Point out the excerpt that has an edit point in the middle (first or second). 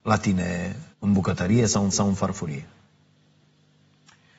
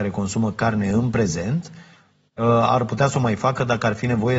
first